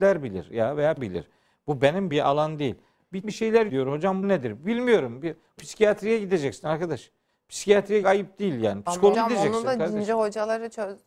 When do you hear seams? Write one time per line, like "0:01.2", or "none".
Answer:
0:01.0
0:02.1
0:03.2
0:03.7
0:04.2
0:05.6
0:08.0
0:09.1